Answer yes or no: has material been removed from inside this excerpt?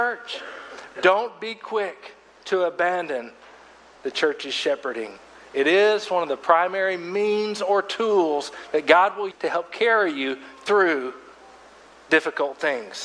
yes